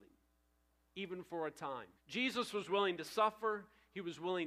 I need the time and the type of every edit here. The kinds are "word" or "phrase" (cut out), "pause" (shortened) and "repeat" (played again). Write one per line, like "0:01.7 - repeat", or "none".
0:02.0 - pause